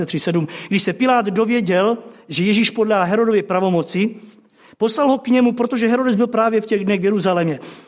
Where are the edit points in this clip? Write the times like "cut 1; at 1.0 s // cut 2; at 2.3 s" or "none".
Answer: none

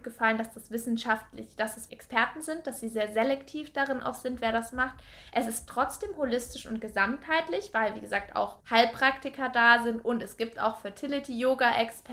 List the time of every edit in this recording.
cut 1; at 1.9 s // cut 2; at 8.6 s

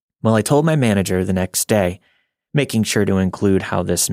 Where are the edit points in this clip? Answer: none

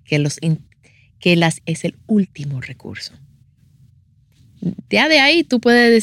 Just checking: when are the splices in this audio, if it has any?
cut 1; at 1.6 s

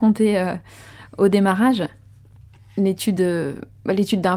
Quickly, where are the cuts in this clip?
none

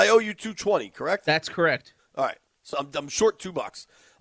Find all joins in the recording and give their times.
cut 1; at 2.0 s // cut 2; at 2.7 s

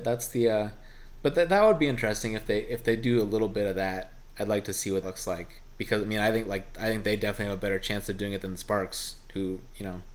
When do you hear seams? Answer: cut 1; at 5.0 s

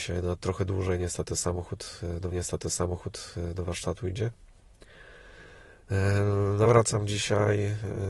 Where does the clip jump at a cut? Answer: cut 1; at 2.3 s // cut 2; at 6.7 s

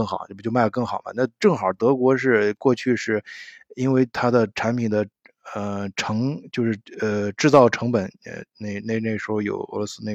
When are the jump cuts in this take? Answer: cut 1; at 4.1 s

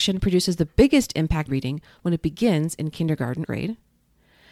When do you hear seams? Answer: cut 1; at 1.5 s // cut 2; at 3.4 s

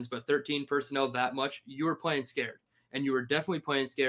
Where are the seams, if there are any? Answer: none

